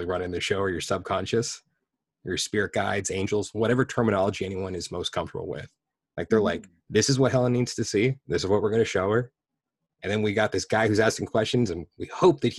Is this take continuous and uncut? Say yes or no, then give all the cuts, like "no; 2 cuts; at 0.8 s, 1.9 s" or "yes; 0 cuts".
yes; 0 cuts